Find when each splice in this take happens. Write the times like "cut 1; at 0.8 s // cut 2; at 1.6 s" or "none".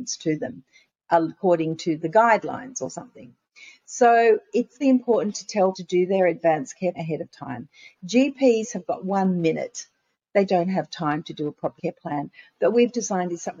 cut 1; at 2.0 s // cut 2; at 4.5 s // cut 3; at 4.8 s // cut 4; at 5.7 s // cut 5; at 6.9 s // cut 6; at 10.5 s // cut 7; at 11.8 s // cut 8; at 12.7 s